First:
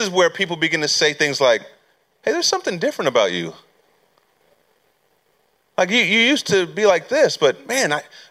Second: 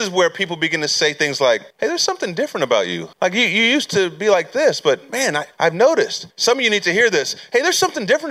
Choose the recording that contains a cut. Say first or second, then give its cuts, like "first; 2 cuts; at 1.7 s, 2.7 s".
second; 4 cuts; at 1.7 s, 3.1 s, 5.5 s, 6.3 s